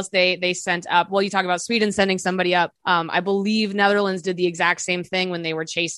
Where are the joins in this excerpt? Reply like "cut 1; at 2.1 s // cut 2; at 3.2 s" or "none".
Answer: cut 1; at 2.8 s